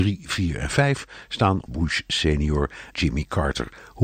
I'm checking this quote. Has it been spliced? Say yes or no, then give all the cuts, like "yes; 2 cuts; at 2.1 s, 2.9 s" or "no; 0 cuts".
yes; 2 cuts; at 1.7 s, 2.9 s